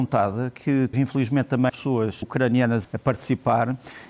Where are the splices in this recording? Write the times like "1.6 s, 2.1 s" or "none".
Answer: 0.9 s, 1.7 s, 2.2 s, 2.8 s